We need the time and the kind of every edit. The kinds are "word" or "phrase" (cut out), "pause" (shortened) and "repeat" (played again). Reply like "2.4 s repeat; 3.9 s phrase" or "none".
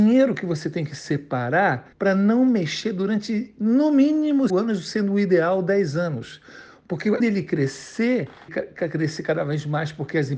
1.9 s pause; 4.5 s word; 7.2 s word; 8.5 s word